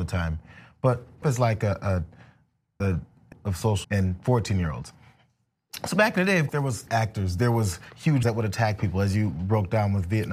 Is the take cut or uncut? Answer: cut